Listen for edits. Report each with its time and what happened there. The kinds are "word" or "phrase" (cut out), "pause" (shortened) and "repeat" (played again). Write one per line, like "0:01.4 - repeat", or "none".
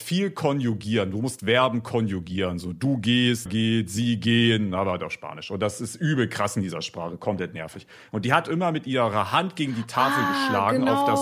0:03.5 - word